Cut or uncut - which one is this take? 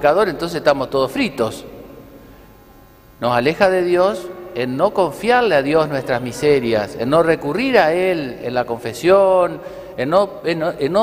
uncut